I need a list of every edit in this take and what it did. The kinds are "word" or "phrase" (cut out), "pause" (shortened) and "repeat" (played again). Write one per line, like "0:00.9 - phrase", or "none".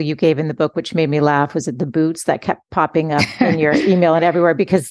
none